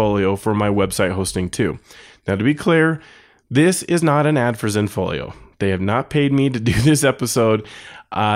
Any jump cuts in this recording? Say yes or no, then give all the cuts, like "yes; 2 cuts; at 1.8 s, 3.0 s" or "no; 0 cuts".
no; 0 cuts